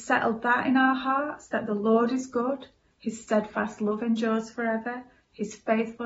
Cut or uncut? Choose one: uncut